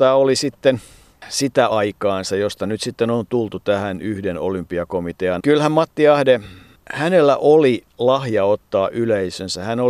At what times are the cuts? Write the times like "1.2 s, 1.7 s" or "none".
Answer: 1.7 s, 5.4 s

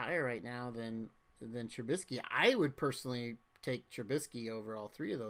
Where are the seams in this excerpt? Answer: none

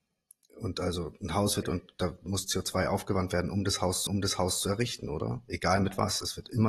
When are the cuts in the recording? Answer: 1.6 s, 4.1 s

